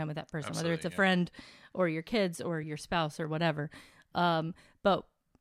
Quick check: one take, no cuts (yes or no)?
yes